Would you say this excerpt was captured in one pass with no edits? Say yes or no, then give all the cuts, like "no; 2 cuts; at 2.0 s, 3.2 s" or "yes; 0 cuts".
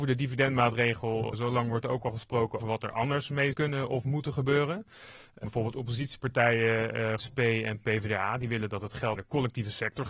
no; 6 cuts; at 1.3 s, 2.6 s, 3.5 s, 5.4 s, 7.2 s, 9.2 s